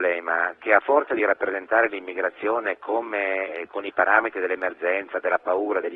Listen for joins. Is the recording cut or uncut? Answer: uncut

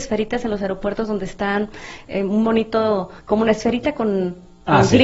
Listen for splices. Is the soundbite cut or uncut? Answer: cut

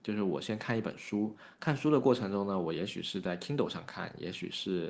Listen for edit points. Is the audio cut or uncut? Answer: uncut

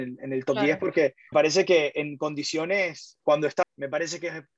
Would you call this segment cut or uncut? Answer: cut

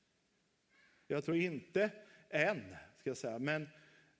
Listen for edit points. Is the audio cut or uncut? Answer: uncut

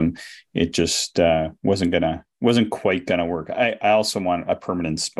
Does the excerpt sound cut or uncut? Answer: cut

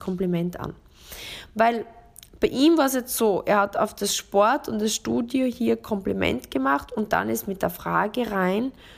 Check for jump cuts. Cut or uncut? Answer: uncut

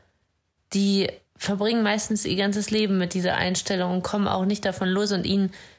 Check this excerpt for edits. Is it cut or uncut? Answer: cut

